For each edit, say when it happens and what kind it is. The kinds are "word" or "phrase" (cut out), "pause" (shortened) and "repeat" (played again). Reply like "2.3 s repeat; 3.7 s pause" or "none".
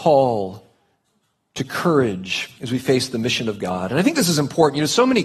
2.6 s pause